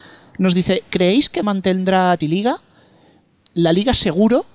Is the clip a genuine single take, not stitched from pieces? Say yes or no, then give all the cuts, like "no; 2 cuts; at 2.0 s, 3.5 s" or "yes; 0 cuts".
no; 2 cuts; at 1.4 s, 2.2 s